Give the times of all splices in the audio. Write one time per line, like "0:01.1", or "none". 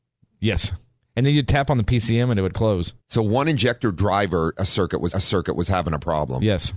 0:03.0
0:05.1